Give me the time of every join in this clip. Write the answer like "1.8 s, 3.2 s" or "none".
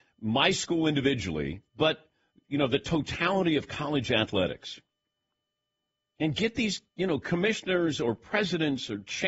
none